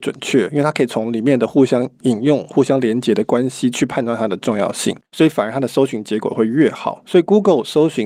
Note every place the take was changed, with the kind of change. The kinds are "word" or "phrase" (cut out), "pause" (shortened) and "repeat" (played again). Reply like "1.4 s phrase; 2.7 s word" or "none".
5.1 s pause